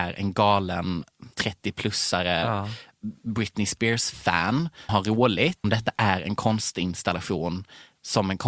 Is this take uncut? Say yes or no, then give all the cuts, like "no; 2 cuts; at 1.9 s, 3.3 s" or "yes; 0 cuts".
no; 3 cuts; at 1.3 s, 4.9 s, 5.6 s